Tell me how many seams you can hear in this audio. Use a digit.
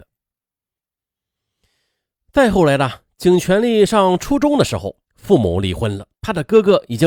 2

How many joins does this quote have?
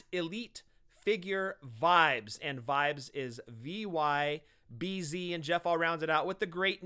0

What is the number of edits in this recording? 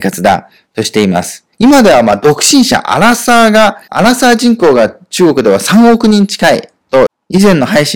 2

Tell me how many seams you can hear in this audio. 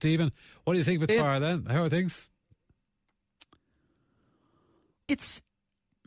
2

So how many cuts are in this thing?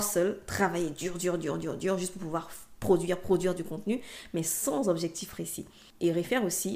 0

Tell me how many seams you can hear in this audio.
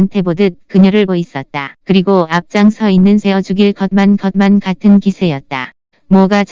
4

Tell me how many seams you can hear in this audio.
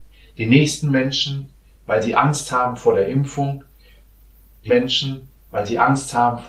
1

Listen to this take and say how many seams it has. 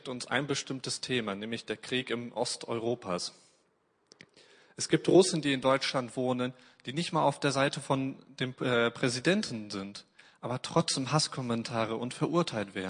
0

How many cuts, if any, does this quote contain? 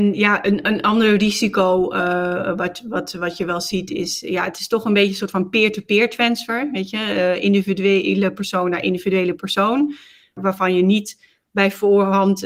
0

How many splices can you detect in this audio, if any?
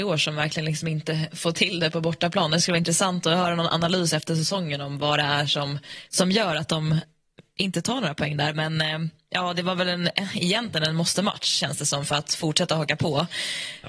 0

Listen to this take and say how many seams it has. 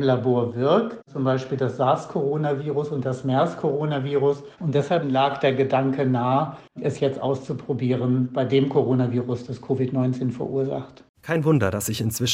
1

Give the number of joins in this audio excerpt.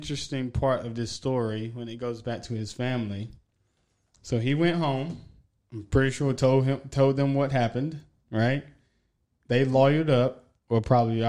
1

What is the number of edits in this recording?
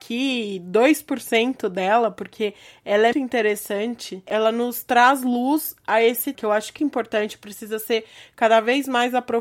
3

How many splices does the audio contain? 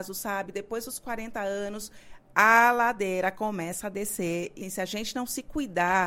1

